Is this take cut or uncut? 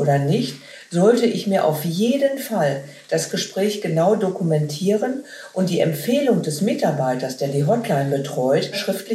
uncut